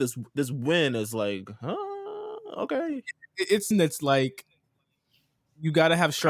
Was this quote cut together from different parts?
yes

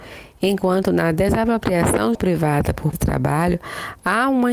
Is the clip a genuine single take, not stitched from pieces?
no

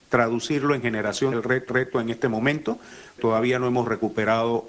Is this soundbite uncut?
no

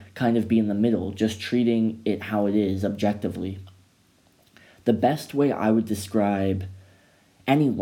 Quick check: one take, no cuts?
yes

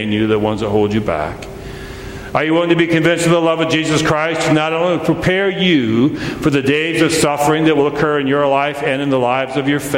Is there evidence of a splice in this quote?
no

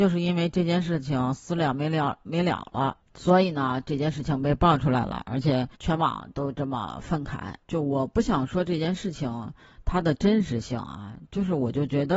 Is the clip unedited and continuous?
no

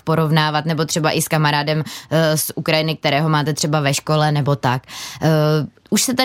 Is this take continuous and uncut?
yes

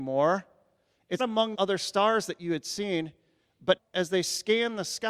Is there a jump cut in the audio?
yes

